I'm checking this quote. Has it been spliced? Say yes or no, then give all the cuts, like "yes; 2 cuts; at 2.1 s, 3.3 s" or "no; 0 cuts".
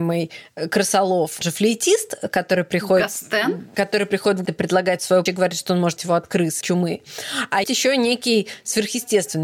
yes; 6 cuts; at 1.4 s, 4.5 s, 5.3 s, 6.0 s, 6.6 s, 7.6 s